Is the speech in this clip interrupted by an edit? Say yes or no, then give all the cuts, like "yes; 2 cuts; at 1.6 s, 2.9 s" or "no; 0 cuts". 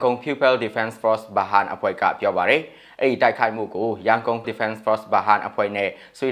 yes; 1 cut; at 4.4 s